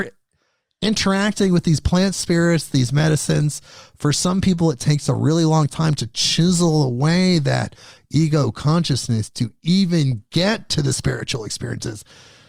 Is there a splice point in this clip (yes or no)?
no